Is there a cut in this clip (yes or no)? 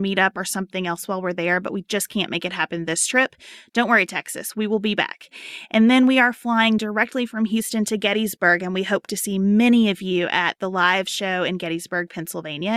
no